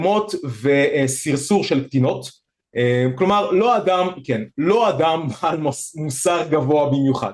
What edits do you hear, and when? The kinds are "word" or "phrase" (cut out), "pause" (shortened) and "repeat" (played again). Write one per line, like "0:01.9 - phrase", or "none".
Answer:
none